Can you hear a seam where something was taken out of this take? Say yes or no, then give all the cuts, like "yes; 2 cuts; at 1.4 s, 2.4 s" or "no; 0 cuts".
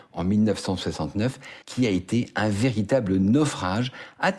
yes; 1 cut; at 1.6 s